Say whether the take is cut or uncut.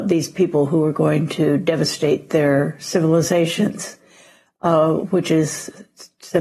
uncut